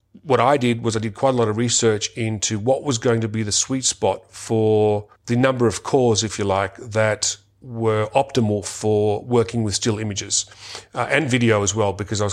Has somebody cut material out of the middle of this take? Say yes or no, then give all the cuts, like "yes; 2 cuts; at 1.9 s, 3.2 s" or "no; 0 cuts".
yes; 1 cut; at 5.1 s